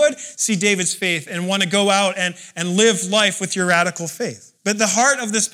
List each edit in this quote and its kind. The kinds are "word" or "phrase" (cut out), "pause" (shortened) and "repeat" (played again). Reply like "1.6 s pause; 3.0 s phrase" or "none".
4.6 s pause